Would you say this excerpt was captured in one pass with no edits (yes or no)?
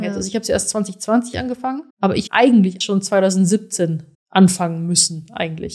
no